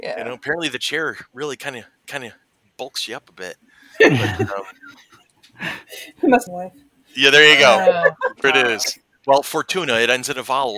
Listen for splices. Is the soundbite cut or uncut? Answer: cut